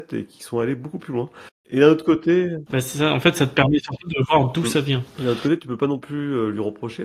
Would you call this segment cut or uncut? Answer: uncut